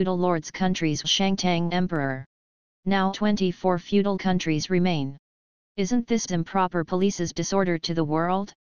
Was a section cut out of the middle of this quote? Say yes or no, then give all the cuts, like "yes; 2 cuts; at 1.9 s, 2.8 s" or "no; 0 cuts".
yes; 6 cuts; at 1.0 s, 1.7 s, 3.1 s, 4.2 s, 6.3 s, 7.4 s